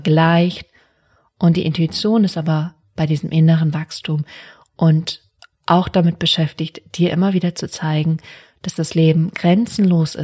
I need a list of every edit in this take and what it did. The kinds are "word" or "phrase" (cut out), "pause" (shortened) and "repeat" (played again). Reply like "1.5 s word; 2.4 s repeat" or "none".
none